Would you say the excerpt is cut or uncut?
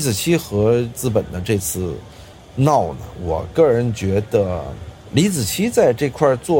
uncut